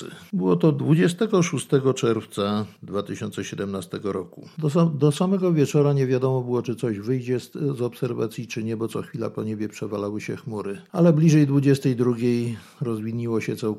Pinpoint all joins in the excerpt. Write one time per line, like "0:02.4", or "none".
none